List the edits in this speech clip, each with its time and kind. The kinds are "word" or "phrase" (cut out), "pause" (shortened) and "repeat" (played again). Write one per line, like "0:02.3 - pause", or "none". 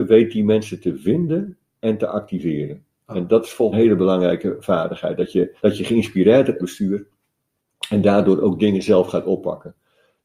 0:03.7 - phrase
0:05.6 - pause
0:06.6 - phrase

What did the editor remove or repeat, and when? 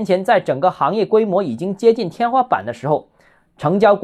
none

